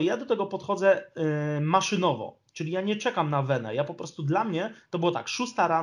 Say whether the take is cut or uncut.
uncut